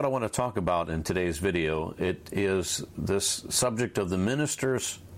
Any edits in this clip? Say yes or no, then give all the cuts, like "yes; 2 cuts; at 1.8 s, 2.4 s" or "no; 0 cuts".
no; 0 cuts